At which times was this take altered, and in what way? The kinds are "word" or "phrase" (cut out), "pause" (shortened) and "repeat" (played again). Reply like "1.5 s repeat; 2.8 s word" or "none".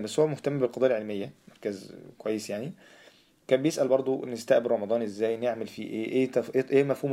none